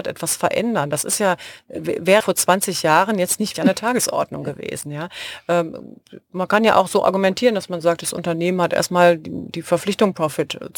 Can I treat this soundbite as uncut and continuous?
no; 2 cuts; at 2.2 s, 3.5 s

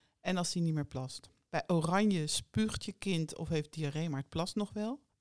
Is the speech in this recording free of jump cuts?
yes; 0 cuts

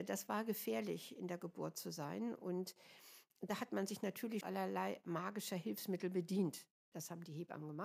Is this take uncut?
no; 1 cut; at 4.4 s

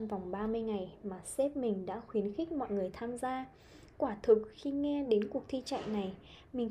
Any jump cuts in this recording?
no; 0 cuts

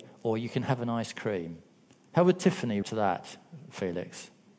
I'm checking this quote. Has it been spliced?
yes; 2 cuts; at 1.9 s, 2.8 s

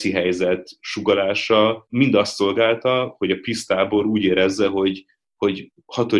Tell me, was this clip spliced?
no; 0 cuts

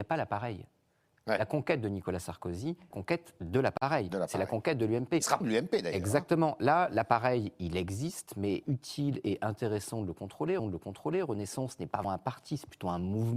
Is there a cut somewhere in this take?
yes; 5 cuts; at 2.9 s, 5.4 s, 8.6 s, 10.6 s, 12.0 s

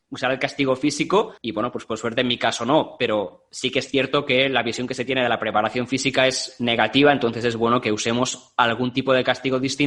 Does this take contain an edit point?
yes; 1 cut; at 1.4 s

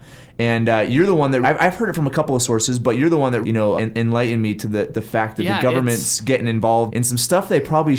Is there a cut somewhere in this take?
yes; 4 cuts; at 1.4 s, 3.4 s, 3.8 s, 6.9 s

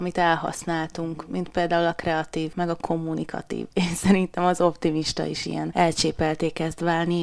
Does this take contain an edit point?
no; 0 cuts

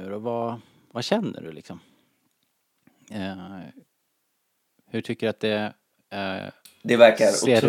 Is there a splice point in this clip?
no; 0 cuts

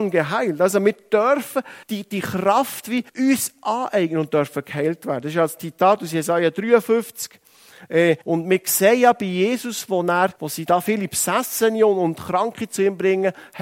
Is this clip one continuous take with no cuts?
no; 4 cuts; at 1.8 s, 3.1 s, 8.2 s, 10.4 s

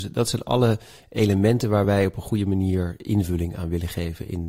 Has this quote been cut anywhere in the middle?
no; 0 cuts

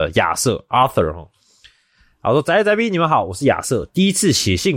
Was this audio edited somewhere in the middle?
no; 0 cuts

